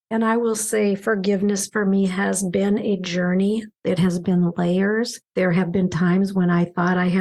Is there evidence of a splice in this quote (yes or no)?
no